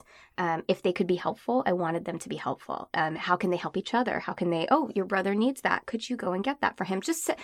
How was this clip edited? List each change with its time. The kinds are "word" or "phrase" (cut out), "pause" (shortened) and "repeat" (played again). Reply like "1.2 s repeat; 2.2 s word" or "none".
none